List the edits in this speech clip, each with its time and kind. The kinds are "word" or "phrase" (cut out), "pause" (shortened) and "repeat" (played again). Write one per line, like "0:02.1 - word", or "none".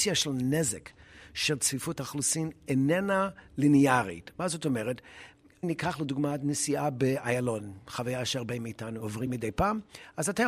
none